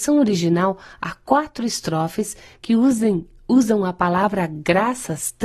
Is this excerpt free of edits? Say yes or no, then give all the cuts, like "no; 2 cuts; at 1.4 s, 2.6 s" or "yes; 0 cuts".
yes; 0 cuts